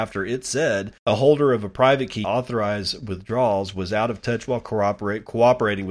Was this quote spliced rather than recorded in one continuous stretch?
yes; 2 cuts; at 1.0 s, 2.2 s

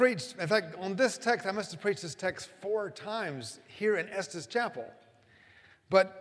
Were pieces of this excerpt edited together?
no; 0 cuts

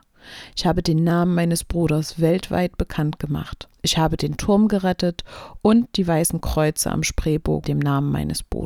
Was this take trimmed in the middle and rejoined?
yes; 2 cuts; at 3.7 s, 7.6 s

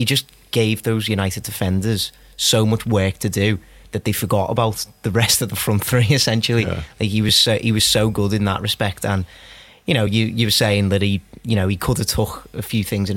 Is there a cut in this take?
no; 0 cuts

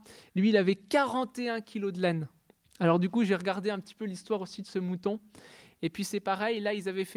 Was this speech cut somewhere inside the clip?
no; 0 cuts

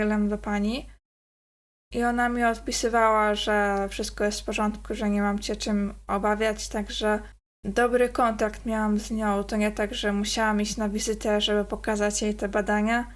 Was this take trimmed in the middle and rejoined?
no; 0 cuts

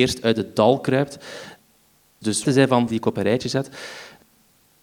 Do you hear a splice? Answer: yes; 2 cuts; at 2.4 s, 2.9 s

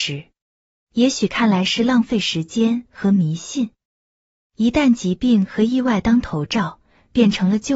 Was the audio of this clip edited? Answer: no; 0 cuts

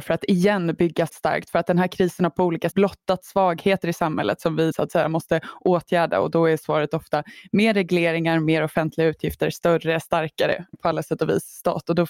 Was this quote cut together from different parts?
yes; 4 cuts; at 1.1 s, 2.7 s, 4.7 s, 10.7 s

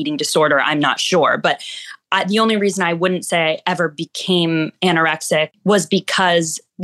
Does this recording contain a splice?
no; 0 cuts

